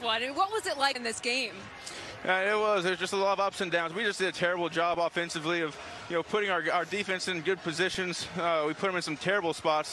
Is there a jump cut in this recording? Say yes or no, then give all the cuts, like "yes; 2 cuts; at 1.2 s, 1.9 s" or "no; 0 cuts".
yes; 1 cut; at 0.9 s